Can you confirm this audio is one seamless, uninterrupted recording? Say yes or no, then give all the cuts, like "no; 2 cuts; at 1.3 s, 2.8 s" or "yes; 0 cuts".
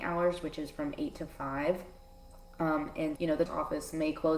no; 2 cuts; at 3.2 s, 3.5 s